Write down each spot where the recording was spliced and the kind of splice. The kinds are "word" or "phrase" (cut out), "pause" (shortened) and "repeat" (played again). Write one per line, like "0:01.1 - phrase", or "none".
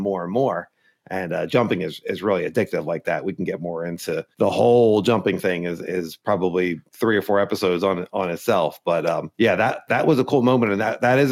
0:04.3 - pause
0:06.9 - pause
0:09.3 - pause